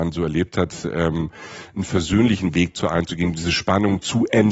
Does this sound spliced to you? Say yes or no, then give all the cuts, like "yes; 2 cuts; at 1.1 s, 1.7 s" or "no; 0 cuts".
no; 0 cuts